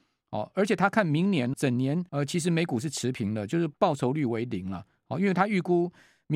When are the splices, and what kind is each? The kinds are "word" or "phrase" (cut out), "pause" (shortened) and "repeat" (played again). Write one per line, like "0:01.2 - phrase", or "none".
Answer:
0:01.5 - word
0:02.1 - pause
0:03.7 - pause